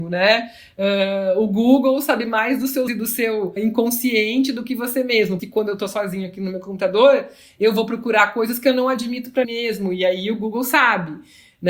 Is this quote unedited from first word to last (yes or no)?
no